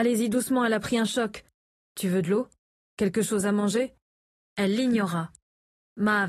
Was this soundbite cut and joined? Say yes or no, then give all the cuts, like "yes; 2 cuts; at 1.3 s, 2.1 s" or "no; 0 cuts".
no; 0 cuts